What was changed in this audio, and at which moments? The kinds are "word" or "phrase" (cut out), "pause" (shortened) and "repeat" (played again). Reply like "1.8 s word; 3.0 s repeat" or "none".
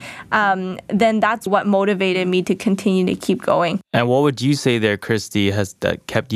1.5 s word